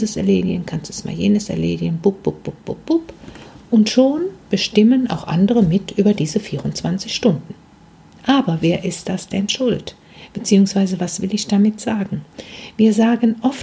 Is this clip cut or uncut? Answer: uncut